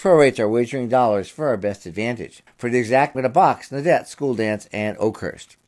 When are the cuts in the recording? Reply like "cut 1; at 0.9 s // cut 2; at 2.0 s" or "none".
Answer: cut 1; at 2.5 s // cut 2; at 3.1 s